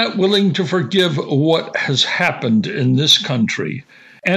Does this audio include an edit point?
no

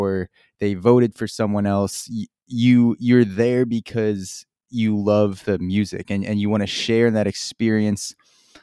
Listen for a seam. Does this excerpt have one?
no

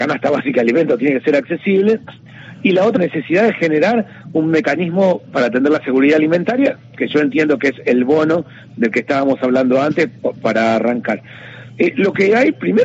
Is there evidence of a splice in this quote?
yes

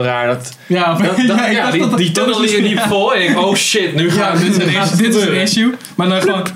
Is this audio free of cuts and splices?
yes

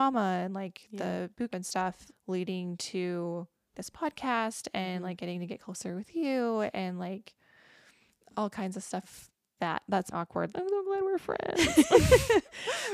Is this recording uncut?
no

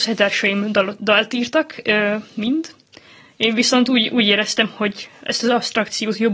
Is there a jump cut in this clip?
no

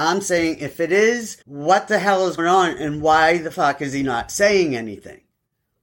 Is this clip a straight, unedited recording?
no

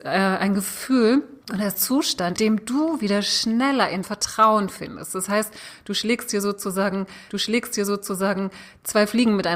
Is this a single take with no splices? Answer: no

